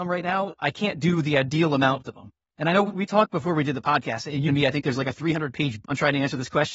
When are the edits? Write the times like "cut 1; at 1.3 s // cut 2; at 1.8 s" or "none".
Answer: cut 1; at 2.0 s // cut 2; at 4.5 s // cut 3; at 5.8 s

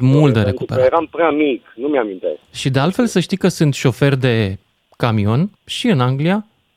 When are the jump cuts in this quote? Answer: cut 1; at 2.4 s // cut 2; at 5.6 s

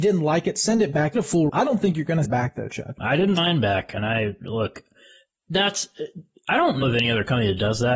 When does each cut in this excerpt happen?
cut 1; at 1.1 s // cut 2; at 1.5 s // cut 3; at 2.2 s // cut 4; at 3.0 s // cut 5; at 3.4 s // cut 6; at 6.8 s

